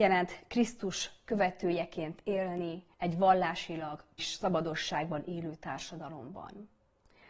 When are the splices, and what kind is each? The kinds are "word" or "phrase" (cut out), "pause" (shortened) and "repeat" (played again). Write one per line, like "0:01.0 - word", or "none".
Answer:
0:02.9 - pause
0:04.2 - phrase

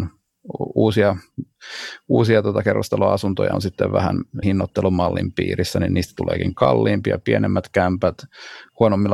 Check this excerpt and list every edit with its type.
0:03.5 - word
0:04.4 - word

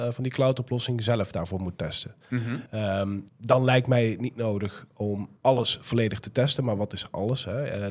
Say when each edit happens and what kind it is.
0:02.7 - pause
0:03.3 - pause
0:05.4 - pause

